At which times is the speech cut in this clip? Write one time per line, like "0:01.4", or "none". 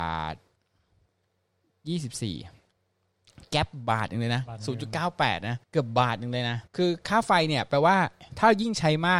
0:05.6
0:06.7